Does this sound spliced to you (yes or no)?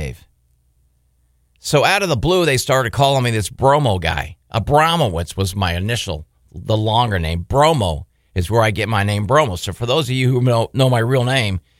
no